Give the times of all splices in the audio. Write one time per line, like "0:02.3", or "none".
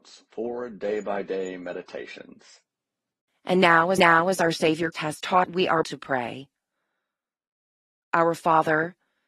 0:03.1
0:04.0
0:04.9
0:05.4
0:05.8